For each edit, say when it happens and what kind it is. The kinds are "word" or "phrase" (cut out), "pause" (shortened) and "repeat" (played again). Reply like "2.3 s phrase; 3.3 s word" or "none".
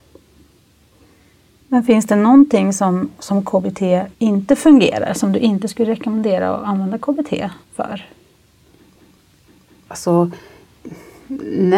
4.1 s pause; 7.6 s pause